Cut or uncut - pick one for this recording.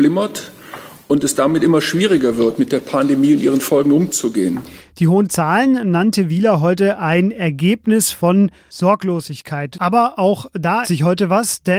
cut